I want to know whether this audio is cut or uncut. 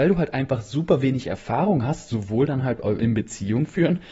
uncut